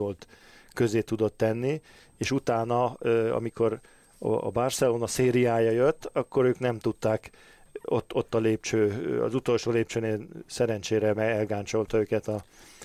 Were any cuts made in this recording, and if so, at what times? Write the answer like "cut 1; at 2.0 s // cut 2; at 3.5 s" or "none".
none